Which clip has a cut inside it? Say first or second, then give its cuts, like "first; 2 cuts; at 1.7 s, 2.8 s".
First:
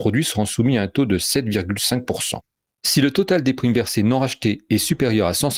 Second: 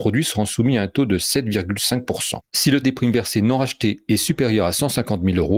second; 2 cuts; at 2.5 s, 2.8 s